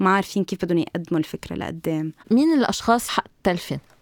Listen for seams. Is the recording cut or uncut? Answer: cut